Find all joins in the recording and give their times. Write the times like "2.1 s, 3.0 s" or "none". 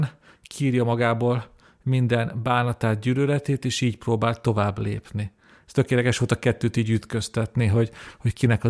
none